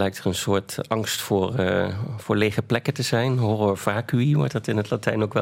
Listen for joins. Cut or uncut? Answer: uncut